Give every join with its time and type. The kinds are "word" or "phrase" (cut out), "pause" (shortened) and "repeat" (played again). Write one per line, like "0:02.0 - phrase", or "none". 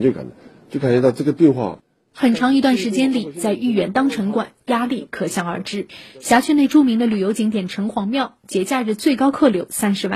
none